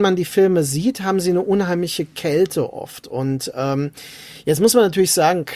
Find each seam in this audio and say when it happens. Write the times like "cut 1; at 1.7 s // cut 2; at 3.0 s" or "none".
none